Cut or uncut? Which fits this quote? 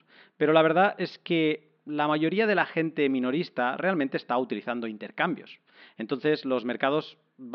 uncut